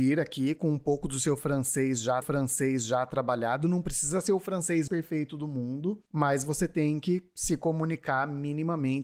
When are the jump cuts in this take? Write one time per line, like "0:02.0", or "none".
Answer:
0:02.2
0:04.9
0:06.1